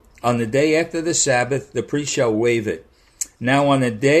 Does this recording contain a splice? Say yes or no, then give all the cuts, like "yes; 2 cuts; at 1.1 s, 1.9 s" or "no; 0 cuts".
no; 0 cuts